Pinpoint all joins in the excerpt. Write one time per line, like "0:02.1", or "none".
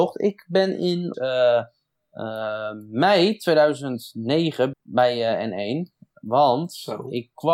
0:01.1
0:04.7